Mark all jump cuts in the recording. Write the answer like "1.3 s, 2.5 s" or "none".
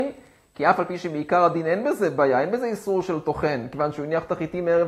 none